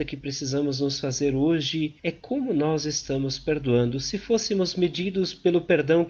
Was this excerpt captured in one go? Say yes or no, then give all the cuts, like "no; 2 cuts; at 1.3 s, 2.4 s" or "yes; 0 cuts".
no; 1 cut; at 2.0 s